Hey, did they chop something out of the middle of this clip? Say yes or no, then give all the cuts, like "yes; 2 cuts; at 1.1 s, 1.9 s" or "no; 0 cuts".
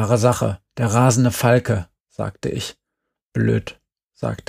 no; 0 cuts